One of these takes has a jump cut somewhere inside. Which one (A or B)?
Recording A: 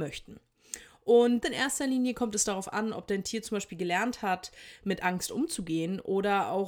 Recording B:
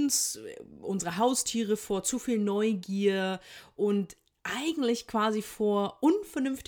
A